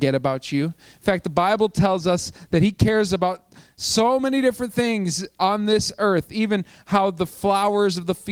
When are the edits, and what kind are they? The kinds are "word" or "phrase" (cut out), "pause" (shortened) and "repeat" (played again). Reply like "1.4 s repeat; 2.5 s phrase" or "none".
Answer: none